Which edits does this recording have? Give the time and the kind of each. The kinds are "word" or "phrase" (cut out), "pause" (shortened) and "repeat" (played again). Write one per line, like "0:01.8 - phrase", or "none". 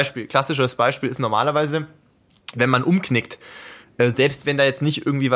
none